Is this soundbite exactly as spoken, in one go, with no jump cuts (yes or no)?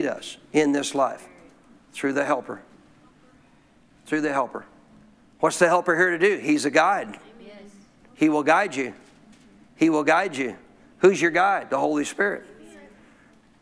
yes